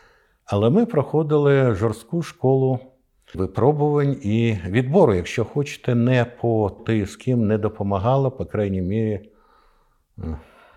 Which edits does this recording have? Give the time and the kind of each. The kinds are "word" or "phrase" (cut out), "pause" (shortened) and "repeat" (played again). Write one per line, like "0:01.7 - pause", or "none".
0:03.3 - word
0:06.8 - phrase